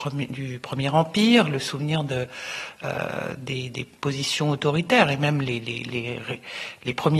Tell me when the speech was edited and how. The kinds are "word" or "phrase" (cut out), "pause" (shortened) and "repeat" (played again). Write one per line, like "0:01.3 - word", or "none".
none

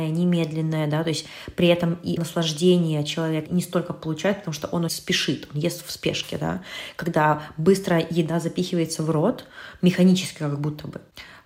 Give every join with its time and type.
0:02.2 - word
0:03.5 - word
0:04.9 - word

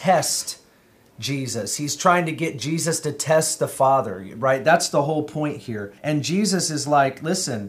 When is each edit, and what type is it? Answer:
0:06.0 - pause

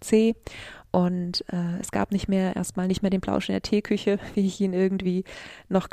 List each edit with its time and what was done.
none

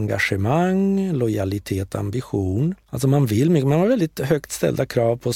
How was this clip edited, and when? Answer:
0:02.8 - pause

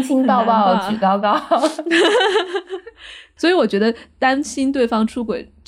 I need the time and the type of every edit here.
0:03.4 - word

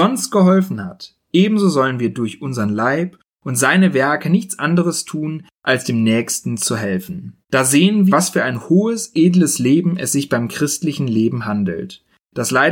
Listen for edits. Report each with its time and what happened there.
0:07.4 - pause
0:08.1 - phrase

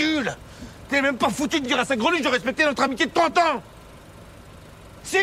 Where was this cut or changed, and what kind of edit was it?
none

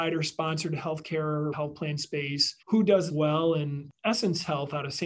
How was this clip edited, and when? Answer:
0:01.5 - phrase
0:02.6 - pause
0:03.1 - word

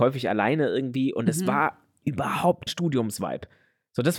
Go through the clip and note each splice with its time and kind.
0:02.7 - word

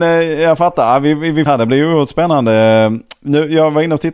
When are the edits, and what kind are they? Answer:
0:01.5 - phrase

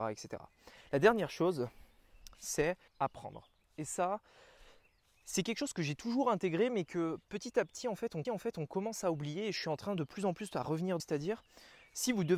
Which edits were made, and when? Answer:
0:02.9 - pause
0:08.2 - repeat
0:11.0 - word

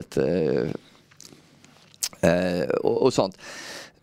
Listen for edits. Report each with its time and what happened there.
none

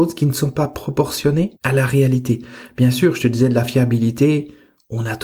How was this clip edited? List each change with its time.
0:01.6 - pause

